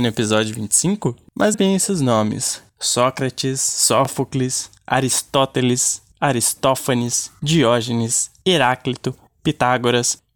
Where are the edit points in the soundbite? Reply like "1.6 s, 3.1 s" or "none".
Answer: 1.5 s